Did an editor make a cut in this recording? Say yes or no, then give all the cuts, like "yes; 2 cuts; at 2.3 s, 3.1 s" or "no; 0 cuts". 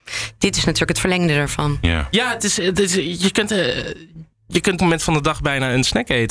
yes; 1 cut; at 4.8 s